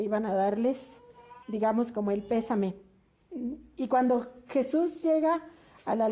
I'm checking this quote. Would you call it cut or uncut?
cut